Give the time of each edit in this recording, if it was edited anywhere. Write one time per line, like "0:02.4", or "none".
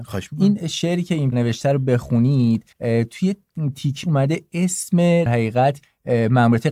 0:01.3
0:02.7
0:04.0
0:05.3